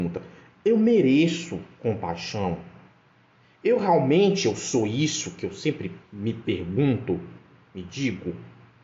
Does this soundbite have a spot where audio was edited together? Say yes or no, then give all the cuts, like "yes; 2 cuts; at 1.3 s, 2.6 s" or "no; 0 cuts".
no; 0 cuts